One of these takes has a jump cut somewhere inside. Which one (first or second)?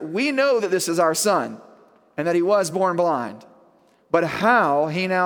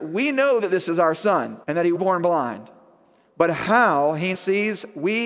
second